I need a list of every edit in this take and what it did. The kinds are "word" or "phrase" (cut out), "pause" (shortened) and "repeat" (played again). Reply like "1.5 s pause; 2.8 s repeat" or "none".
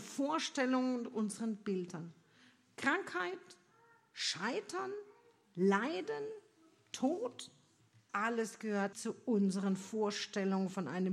8.1 s word; 8.9 s word